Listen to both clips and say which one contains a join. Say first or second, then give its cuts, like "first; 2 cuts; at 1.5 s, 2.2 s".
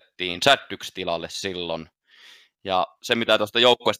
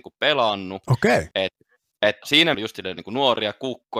second; 3 cuts; at 1.3 s, 2.2 s, 2.5 s